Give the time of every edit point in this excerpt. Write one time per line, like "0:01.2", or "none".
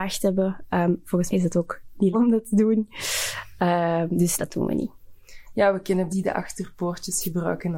0:01.3
0:02.1
0:04.4
0:06.1